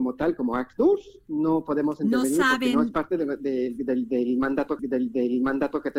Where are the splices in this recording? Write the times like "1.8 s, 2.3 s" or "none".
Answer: 4.8 s